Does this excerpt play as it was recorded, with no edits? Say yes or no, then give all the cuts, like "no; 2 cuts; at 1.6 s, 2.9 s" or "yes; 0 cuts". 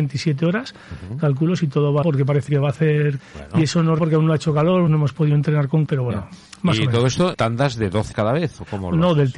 no; 8 cuts; at 2.0 s, 2.5 s, 3.2 s, 4.0 s, 4.9 s, 5.9 s, 7.3 s, 8.1 s